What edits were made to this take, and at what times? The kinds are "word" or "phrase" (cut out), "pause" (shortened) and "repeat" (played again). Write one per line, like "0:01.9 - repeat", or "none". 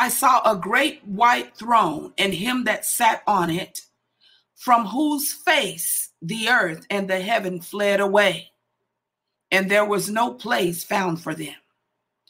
none